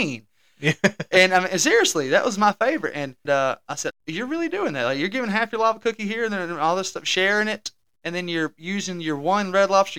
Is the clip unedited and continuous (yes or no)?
no